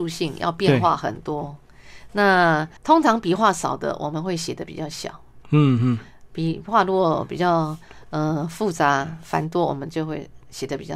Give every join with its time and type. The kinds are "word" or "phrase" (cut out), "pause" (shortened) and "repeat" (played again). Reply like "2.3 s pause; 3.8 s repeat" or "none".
2.8 s pause